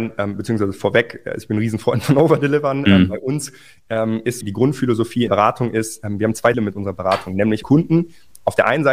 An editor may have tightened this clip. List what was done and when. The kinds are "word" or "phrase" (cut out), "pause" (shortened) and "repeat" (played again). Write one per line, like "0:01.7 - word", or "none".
0:04.4 - word
0:05.3 - word
0:06.5 - word
0:07.6 - word